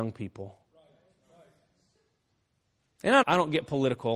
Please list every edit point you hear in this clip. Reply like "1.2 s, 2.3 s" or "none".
3.2 s